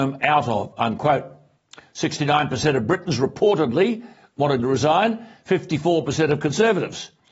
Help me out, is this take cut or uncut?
cut